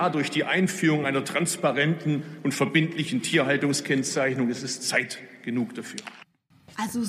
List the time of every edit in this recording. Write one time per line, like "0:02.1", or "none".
none